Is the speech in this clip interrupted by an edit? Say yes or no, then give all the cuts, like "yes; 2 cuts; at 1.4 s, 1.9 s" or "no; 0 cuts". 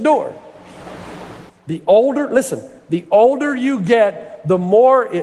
yes; 1 cut; at 1.5 s